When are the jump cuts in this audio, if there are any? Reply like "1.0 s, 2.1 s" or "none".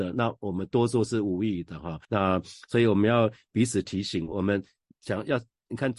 2.0 s